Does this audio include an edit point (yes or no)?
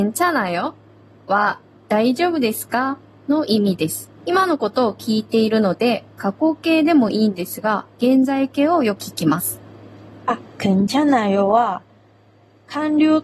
yes